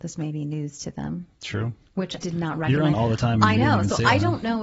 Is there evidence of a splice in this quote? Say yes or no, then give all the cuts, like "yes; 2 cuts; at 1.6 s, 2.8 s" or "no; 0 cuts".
yes; 2 cuts; at 2.2 s, 2.9 s